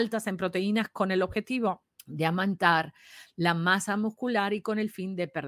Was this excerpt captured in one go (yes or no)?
no